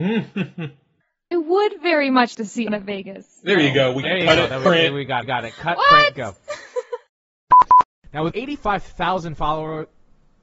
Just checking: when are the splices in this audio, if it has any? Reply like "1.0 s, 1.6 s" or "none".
1.3 s, 2.3 s, 2.7 s, 4.0 s, 5.2 s, 8.3 s